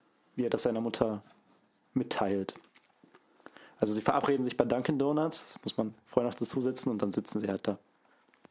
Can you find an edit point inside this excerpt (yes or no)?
no